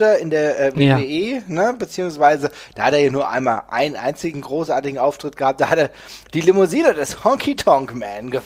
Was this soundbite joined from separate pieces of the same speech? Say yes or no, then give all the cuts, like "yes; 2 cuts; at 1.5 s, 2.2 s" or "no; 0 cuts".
no; 0 cuts